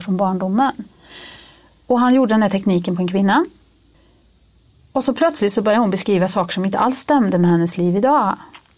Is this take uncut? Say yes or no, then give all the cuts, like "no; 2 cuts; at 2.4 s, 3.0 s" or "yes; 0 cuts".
yes; 0 cuts